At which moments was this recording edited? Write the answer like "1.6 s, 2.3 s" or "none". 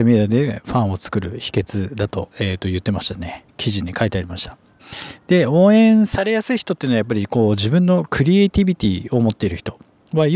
2.3 s, 3.5 s